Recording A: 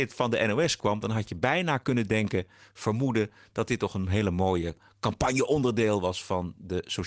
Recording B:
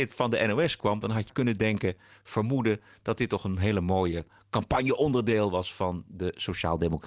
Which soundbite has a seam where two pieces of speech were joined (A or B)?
B